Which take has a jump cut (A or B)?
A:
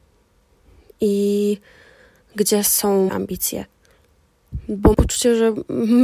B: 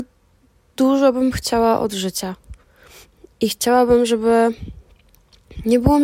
A